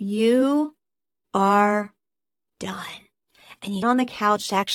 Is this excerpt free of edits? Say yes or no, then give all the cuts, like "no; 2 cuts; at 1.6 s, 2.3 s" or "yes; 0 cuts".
no; 1 cut; at 3.8 s